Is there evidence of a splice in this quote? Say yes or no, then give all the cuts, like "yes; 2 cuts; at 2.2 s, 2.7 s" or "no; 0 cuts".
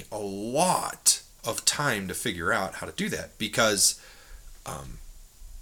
yes; 1 cut; at 1.3 s